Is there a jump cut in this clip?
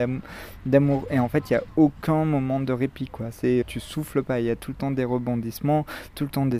yes; 1 cut; at 3.6 s

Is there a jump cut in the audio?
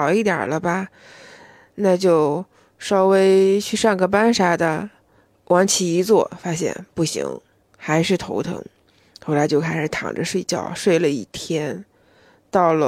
no; 0 cuts

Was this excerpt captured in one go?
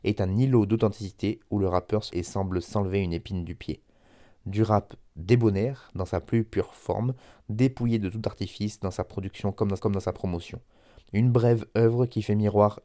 no; 2 cuts; at 2.1 s, 9.8 s

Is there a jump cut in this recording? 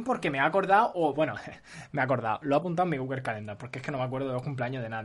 no; 0 cuts

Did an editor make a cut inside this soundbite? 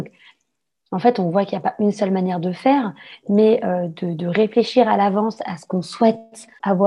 no; 0 cuts

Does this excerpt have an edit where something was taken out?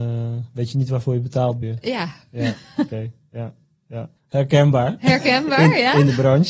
yes; 2 cuts; at 1.6 s, 4.2 s

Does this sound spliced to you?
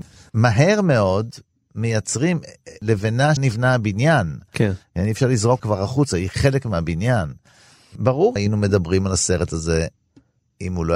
yes; 3 cuts; at 3.4 s, 5.6 s, 8.4 s

